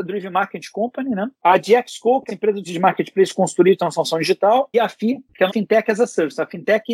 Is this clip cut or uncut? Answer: cut